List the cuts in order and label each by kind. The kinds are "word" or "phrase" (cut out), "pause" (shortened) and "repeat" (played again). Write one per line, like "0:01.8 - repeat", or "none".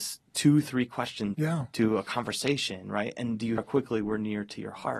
0:01.3 - word
0:03.6 - word